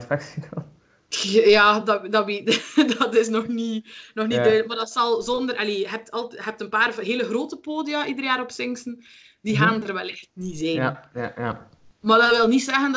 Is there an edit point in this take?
no; 0 cuts

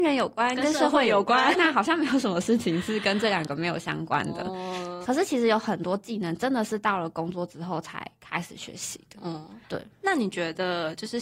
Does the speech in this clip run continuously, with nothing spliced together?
no; 2 cuts; at 1.5 s, 9.6 s

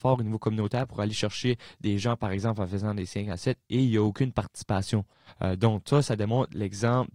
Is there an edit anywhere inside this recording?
no; 0 cuts

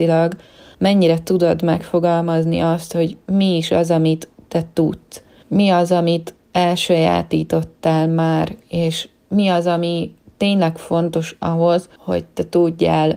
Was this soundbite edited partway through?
no; 0 cuts

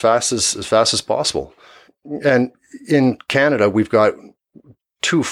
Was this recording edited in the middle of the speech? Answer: no; 0 cuts

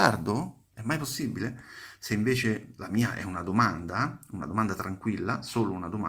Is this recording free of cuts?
yes; 0 cuts

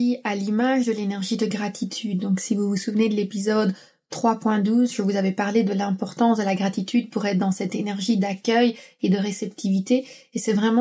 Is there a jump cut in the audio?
no; 0 cuts

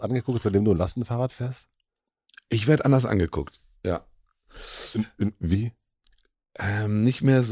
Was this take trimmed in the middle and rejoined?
no; 0 cuts

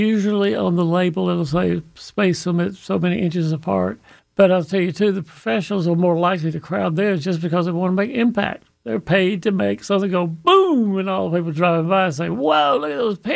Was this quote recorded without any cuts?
no; 1 cut; at 4.2 s

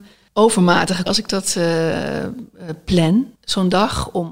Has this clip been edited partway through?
yes; 2 cuts; at 1.1 s, 3.4 s

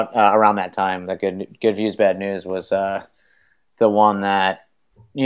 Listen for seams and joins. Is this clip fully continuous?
yes; 0 cuts

